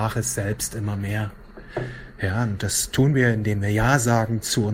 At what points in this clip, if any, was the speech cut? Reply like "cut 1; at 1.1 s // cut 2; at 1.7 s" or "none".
none